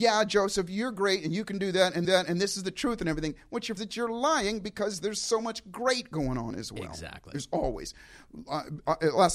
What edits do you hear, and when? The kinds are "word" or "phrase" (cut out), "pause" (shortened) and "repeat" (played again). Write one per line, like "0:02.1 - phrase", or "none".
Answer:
0:02.0 - repeat
0:03.8 - phrase